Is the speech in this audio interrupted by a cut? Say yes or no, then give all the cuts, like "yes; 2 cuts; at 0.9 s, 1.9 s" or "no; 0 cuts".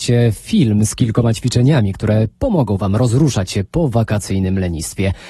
no; 0 cuts